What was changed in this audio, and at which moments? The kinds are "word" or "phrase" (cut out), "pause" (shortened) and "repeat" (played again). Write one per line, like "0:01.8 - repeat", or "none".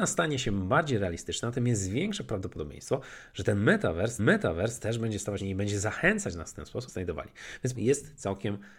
0:04.2 - repeat
0:05.4 - phrase
0:06.9 - phrase
0:07.7 - word